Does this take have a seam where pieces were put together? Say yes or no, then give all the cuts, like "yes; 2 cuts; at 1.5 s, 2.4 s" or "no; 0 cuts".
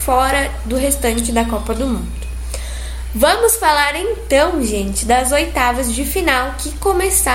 no; 0 cuts